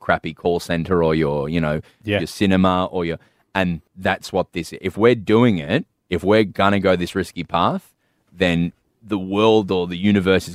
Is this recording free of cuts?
yes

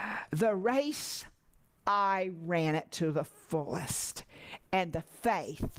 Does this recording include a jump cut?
no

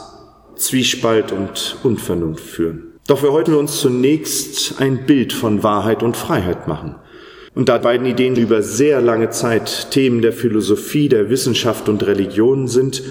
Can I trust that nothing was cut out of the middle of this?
no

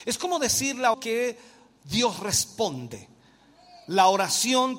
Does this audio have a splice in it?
yes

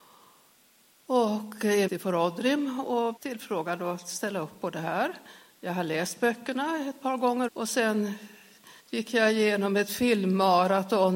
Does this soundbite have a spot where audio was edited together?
yes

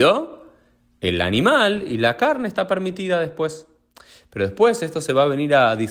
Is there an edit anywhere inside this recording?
no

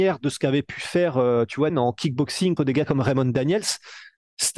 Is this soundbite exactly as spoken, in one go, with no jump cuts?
no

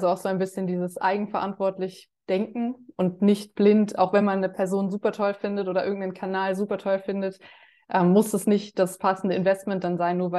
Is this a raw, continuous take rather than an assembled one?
yes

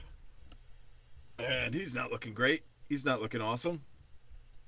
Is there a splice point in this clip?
no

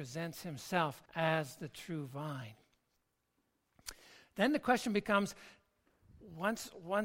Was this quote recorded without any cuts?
no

